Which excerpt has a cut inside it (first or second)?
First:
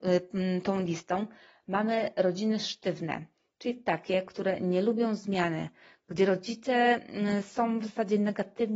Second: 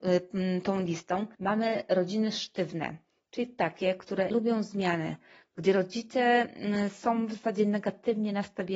second